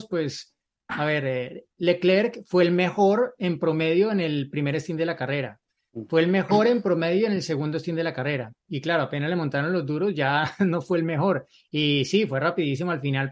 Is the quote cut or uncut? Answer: uncut